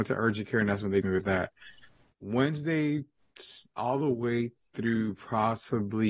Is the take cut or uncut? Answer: cut